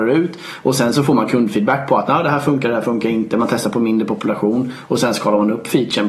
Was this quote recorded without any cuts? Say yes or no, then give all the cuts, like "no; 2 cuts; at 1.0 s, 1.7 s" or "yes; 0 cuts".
yes; 0 cuts